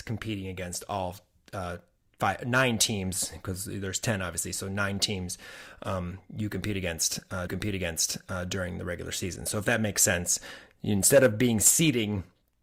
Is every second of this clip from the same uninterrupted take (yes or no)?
no